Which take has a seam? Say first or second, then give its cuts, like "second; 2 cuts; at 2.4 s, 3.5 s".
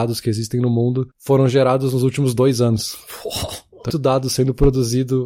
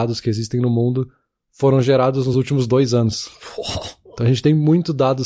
first; 2 cuts; at 1.1 s, 3.9 s